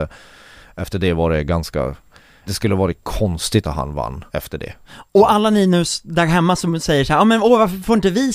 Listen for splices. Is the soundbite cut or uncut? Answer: cut